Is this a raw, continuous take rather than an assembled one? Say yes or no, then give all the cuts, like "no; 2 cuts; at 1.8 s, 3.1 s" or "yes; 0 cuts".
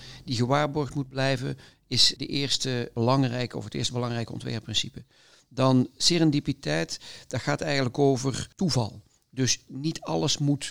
yes; 0 cuts